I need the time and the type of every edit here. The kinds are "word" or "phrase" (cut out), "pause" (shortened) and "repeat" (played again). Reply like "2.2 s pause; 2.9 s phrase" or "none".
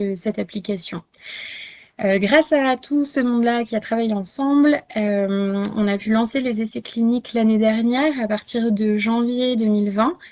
none